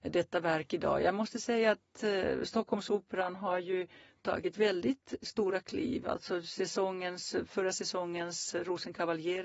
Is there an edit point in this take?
no; 0 cuts

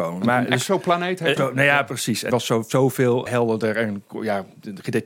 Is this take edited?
yes; 3 cuts; at 1.4 s, 2.3 s, 3.3 s

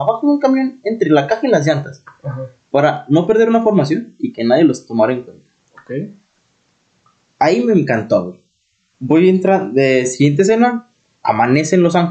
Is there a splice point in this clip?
no; 0 cuts

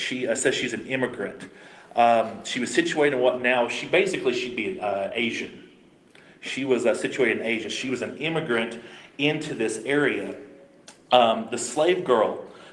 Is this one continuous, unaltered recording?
yes; 0 cuts

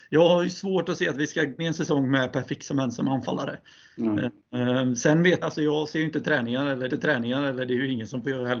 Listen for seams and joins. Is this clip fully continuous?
no; 3 cuts; at 1.6 s, 5.4 s, 6.9 s

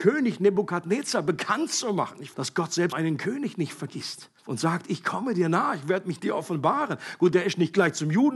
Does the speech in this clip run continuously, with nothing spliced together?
no; 3 cuts; at 2.3 s, 2.9 s, 4.4 s

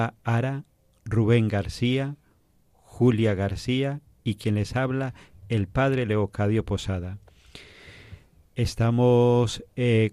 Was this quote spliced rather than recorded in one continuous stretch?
no; 0 cuts

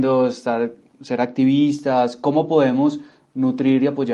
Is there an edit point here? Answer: no; 0 cuts

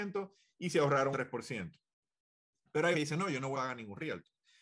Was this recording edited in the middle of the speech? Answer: yes; 3 cuts; at 1.1 s, 2.9 s, 3.5 s

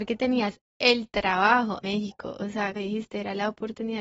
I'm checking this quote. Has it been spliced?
yes; 2 cuts; at 1.8 s, 2.8 s

